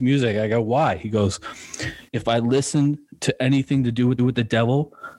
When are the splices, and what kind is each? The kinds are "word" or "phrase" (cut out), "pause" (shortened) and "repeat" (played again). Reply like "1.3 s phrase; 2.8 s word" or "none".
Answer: 2.1 s pause; 4.2 s repeat